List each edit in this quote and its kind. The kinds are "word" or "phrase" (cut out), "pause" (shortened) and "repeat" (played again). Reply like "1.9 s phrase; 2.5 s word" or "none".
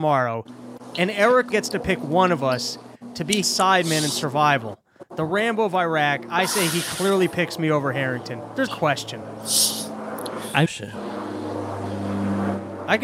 1.5 s word; 3.4 s word; 8.7 s phrase; 10.7 s phrase